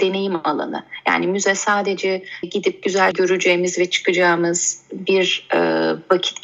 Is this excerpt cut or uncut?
cut